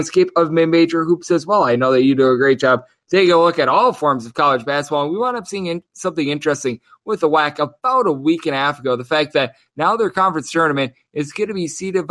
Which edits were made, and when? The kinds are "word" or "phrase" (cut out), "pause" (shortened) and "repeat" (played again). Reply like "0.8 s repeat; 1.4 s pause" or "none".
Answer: none